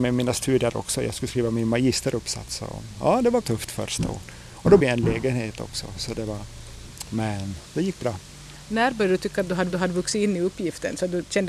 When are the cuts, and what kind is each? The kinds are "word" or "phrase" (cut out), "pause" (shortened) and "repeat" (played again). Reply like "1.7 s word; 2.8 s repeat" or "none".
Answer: 3.4 s word; 4.8 s word; 9.7 s repeat